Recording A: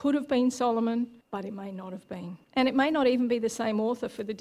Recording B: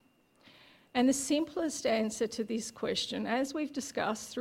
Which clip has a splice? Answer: A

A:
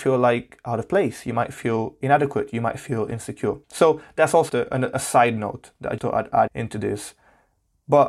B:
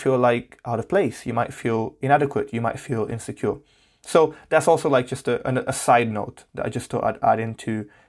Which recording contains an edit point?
A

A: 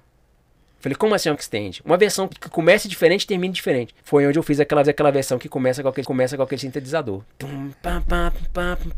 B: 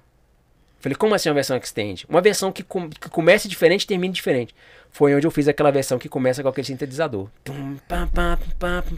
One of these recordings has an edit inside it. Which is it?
A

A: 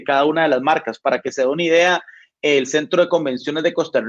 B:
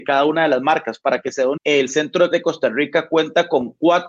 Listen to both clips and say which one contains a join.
B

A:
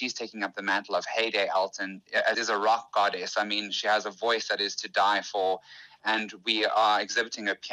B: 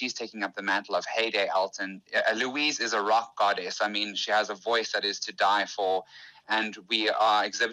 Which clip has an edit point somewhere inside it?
A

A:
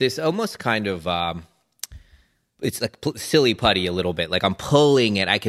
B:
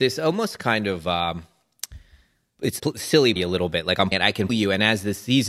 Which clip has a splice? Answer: B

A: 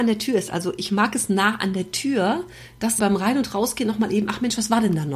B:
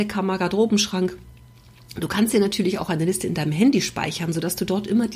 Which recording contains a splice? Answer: A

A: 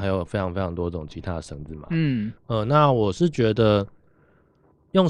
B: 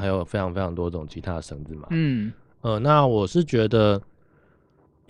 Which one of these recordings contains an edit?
A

